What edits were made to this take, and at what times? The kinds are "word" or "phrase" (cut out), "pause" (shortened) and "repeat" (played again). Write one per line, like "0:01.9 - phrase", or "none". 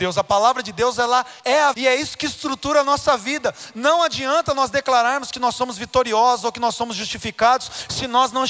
0:01.4 - pause
0:01.7 - word

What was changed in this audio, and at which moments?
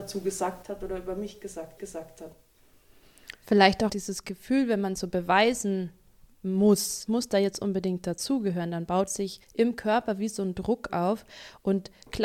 0:01.8 - repeat
0:03.9 - word
0:05.0 - word
0:07.1 - phrase
0:09.1 - word
0:09.4 - pause

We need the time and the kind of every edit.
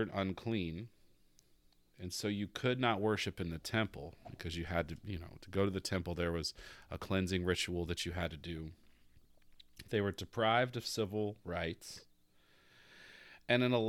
none

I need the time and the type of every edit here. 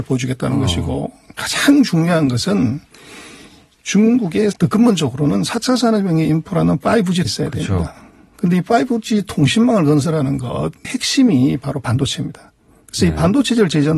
0:04.5 - phrase
0:07.3 - word
0:10.8 - word

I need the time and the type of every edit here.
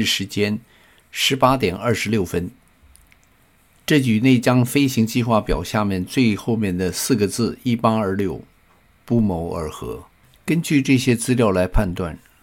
none

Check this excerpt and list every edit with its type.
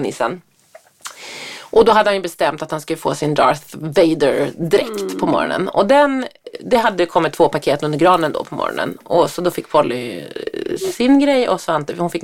none

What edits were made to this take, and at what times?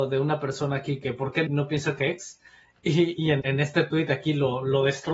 0:01.0 - word
0:01.5 - word
0:02.0 - word
0:03.4 - word

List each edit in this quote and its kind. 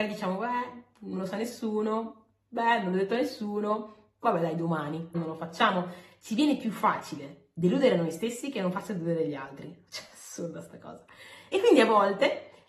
0:05.1 - phrase

